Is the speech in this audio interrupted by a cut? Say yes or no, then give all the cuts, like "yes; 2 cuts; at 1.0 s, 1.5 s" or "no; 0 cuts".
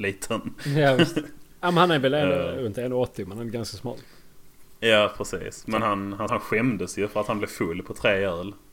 yes; 1 cut; at 6.3 s